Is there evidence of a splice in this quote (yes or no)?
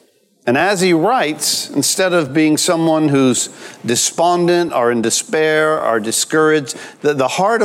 no